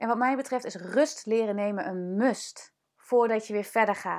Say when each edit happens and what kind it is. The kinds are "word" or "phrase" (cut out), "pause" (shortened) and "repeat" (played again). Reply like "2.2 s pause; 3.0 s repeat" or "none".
2.8 s pause